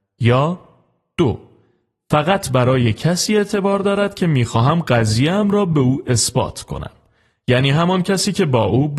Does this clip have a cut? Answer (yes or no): no